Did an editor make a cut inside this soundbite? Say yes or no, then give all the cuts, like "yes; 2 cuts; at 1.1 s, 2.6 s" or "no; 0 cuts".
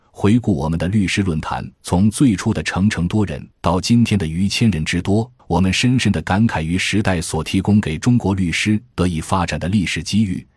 yes; 3 cuts; at 1.7 s, 3.5 s, 5.4 s